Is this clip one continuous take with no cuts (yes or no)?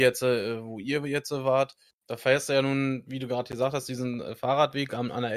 yes